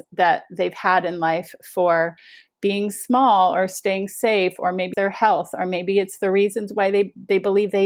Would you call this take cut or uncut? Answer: cut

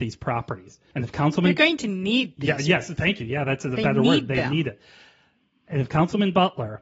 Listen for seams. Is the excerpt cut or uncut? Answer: uncut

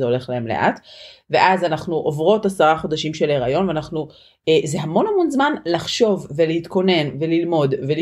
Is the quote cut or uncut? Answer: uncut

